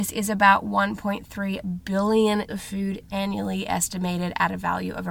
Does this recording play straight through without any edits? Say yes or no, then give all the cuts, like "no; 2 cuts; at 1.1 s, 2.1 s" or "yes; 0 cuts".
no; 1 cut; at 2.5 s